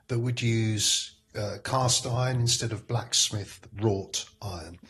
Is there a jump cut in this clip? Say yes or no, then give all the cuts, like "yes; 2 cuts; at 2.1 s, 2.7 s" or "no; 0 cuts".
no; 0 cuts